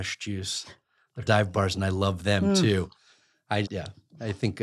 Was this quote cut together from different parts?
yes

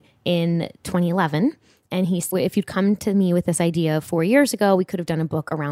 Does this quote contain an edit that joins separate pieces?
no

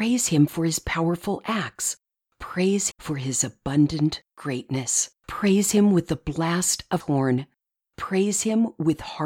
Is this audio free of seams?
no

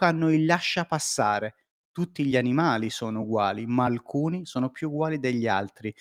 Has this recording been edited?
no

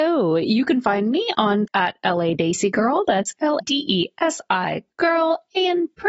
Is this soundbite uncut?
no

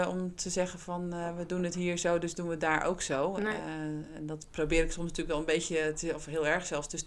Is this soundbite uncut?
yes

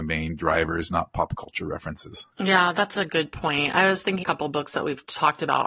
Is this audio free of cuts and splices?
no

